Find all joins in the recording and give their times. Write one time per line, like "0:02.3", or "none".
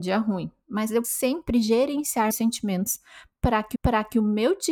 0:01.0
0:02.3
0:03.7

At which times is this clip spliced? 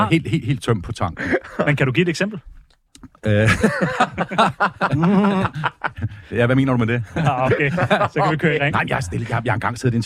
0:03.2

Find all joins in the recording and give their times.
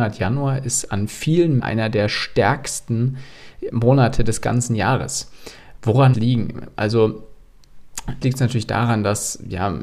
0:01.6
0:03.7
0:06.1
0:08.2

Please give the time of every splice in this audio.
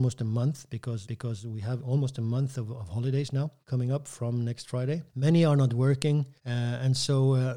0:01.0
0:01.8
0:03.6
0:05.1
0:06.4

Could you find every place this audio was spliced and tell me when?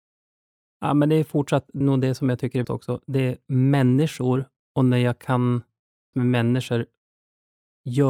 0:01.8
0:02.6
0:06.1

